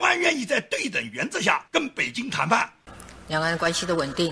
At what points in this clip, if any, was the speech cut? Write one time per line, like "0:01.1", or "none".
0:01.7